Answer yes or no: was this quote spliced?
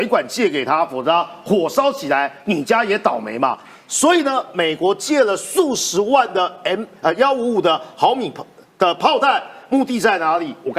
no